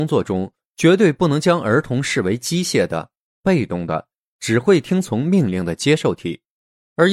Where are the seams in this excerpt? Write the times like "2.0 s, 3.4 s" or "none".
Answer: none